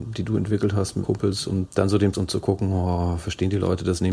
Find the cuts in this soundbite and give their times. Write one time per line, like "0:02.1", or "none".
0:01.0
0:01.7
0:02.1